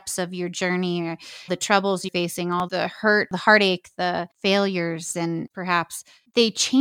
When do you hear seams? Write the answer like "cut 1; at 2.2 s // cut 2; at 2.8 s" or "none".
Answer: cut 1; at 1.5 s // cut 2; at 2.1 s // cut 3; at 2.7 s // cut 4; at 5.5 s